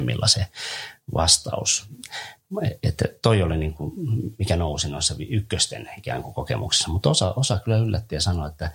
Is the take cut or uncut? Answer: uncut